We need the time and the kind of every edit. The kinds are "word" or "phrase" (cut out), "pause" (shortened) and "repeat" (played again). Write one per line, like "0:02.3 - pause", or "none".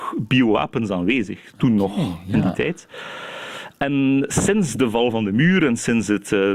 none